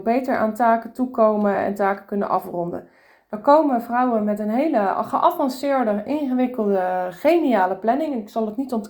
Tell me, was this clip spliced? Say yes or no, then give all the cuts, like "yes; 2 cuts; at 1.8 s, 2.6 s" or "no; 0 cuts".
no; 0 cuts